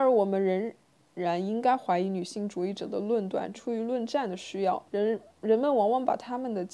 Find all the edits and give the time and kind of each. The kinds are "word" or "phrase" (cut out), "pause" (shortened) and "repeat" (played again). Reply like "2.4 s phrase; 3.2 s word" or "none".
4.9 s pause

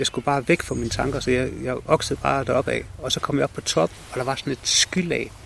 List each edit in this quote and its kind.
none

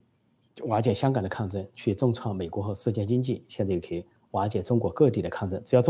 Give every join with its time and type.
none

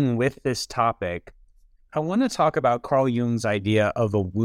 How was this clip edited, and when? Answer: none

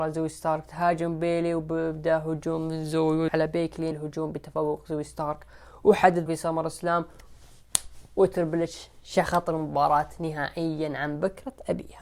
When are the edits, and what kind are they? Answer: 3.3 s word; 3.9 s word; 6.3 s word

